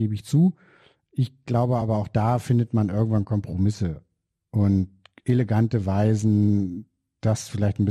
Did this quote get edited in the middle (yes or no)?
no